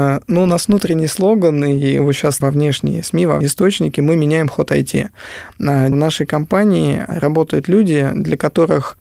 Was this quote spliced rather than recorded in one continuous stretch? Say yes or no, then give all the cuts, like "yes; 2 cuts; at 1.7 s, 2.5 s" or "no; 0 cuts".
yes; 4 cuts; at 2.0 s, 2.4 s, 3.4 s, 5.9 s